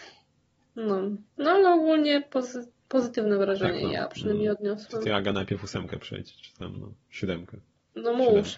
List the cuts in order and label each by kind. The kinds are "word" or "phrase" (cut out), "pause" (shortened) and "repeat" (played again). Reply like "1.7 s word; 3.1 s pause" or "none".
1.3 s pause